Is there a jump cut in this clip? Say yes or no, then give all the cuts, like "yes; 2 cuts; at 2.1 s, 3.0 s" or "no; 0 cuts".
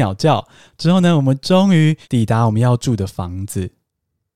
yes; 1 cut; at 2.0 s